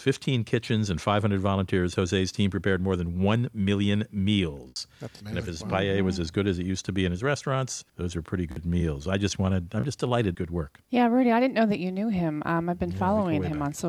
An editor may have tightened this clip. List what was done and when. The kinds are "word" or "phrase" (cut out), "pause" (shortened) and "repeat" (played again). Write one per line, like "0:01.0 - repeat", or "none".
0:07.9 - pause
0:10.3 - phrase
0:10.8 - pause